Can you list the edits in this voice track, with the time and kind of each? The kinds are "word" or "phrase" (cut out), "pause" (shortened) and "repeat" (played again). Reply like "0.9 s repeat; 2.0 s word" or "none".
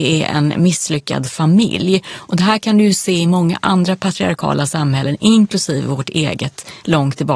none